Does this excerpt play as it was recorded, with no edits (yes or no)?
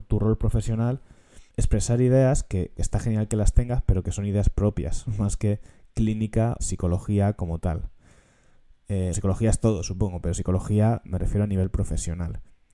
no